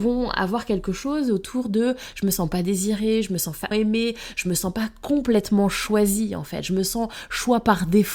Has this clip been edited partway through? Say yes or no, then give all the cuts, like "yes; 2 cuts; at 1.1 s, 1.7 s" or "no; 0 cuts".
yes; 1 cut; at 3.7 s